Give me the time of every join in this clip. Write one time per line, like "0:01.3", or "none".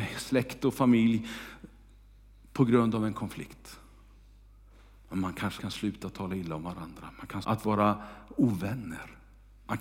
0:05.6
0:07.4